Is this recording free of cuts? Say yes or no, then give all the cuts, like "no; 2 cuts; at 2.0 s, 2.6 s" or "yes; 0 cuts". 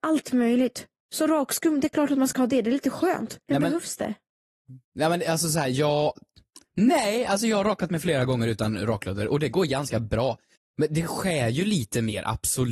no; 3 cuts; at 3.4 s, 4.8 s, 10.6 s